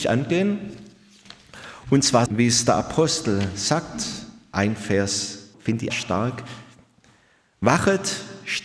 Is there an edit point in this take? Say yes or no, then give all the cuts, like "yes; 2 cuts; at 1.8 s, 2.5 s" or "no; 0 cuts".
yes; 3 cuts; at 2.3 s, 5.5 s, 5.9 s